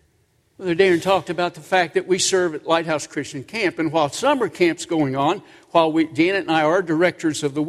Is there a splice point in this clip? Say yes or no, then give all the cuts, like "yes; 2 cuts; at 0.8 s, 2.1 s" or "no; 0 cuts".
no; 0 cuts